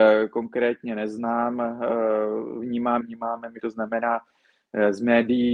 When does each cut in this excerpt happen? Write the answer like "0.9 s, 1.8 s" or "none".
3.0 s, 3.6 s

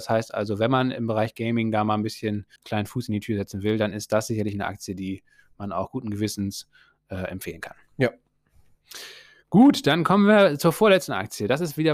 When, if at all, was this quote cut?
2.6 s

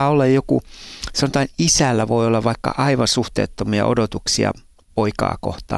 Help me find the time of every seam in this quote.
none

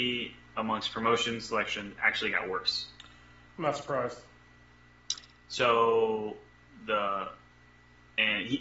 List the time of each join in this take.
none

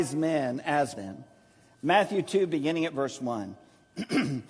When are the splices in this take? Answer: 0.9 s

